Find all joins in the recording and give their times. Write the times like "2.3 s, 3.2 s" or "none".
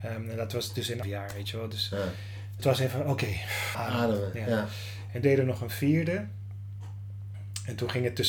1.0 s, 2.6 s, 3.7 s, 5.2 s